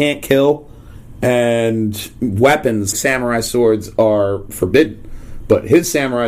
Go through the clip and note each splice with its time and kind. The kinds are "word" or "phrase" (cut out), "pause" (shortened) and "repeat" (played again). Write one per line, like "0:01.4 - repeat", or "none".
0:02.9 - word